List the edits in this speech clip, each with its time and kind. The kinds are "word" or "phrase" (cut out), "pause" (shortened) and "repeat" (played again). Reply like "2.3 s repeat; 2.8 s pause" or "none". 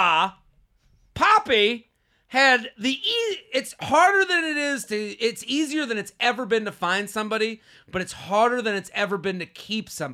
none